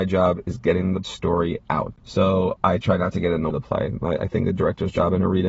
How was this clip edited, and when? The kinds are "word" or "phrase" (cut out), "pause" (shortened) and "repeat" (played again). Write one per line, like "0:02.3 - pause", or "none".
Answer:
0:01.0 - word
0:03.5 - word